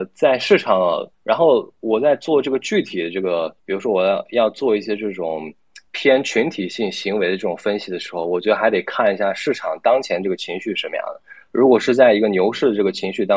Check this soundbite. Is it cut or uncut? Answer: cut